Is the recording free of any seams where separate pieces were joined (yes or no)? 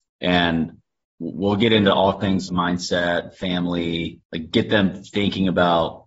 no